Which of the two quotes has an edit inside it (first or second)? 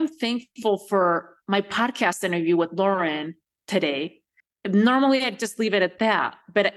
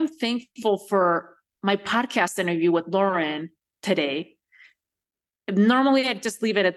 first